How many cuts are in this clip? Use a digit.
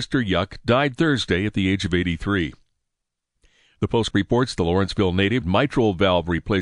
2